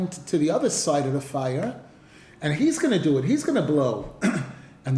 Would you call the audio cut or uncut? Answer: uncut